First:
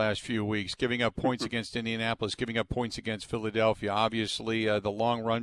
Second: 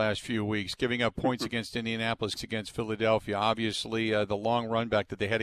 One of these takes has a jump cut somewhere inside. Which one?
second; 1 cut; at 2.4 s

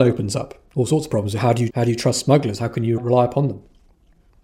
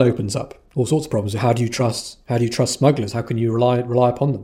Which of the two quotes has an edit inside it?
first; 2 cuts; at 1.7 s, 3.0 s

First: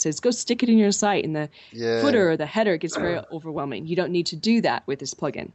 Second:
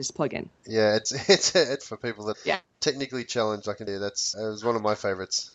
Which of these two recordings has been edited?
second; 5 cuts; at 1.1 s, 1.8 s, 2.3 s, 3.9 s, 4.3 s

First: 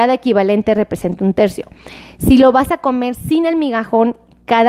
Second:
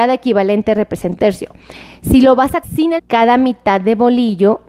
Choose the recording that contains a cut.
second; 3 cuts; at 1.2 s, 2.6 s, 3.0 s

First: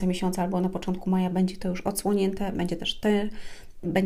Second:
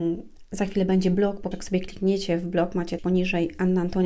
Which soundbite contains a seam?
second; 2 cuts; at 1.5 s, 3.0 s

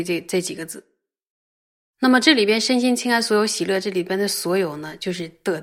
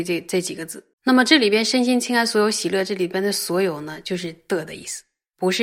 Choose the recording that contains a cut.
second; 1 cut; at 0.9 s

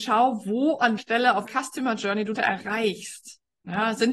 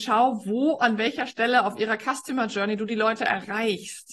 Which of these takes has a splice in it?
first; 3 cuts; at 1.0 s, 1.5 s, 2.3 s

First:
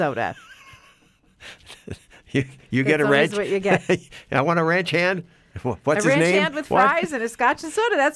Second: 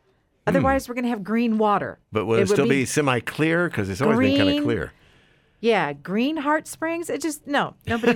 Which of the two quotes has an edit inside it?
second; 1 cut; at 2.0 s

